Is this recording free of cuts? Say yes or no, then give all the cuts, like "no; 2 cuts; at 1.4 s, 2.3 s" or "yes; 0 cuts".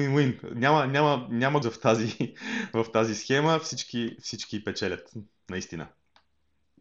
no; 1 cut; at 1.6 s